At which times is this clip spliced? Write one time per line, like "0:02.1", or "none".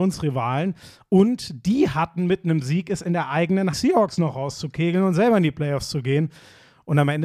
0:03.7